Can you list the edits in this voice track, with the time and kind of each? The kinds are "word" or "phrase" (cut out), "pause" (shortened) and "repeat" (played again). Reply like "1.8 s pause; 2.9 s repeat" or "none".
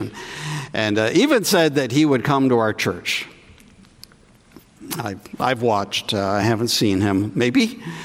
none